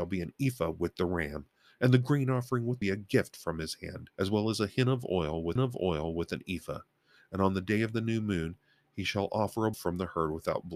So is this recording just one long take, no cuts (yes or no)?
no